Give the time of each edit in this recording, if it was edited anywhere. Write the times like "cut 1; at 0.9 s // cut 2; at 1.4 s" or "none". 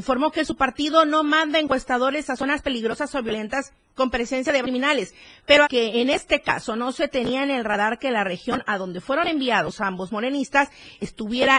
cut 1; at 4.6 s // cut 2; at 5.6 s